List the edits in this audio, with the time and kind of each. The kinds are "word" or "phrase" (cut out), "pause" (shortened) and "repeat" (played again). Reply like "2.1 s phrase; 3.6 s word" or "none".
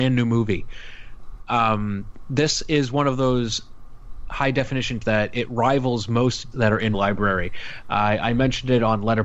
5.0 s word; 6.5 s word; 6.9 s word